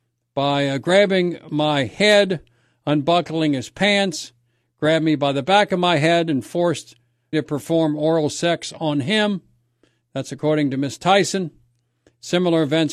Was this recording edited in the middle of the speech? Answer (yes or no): yes